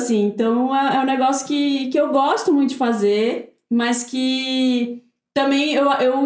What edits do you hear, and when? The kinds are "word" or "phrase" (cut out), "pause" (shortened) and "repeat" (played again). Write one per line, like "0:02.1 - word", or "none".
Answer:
none